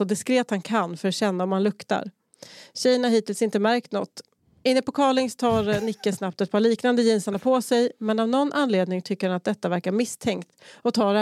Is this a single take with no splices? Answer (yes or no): yes